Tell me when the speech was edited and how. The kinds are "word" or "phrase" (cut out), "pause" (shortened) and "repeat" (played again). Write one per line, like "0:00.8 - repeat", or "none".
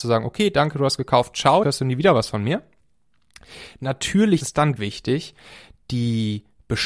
0:01.6 - word
0:04.4 - word
0:04.8 - word